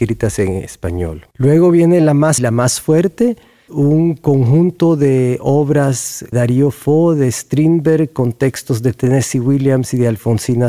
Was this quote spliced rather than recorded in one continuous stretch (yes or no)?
yes